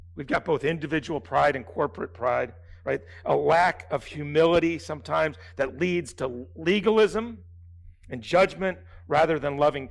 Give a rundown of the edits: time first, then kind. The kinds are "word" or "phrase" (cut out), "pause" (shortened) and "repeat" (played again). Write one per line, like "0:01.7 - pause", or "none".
none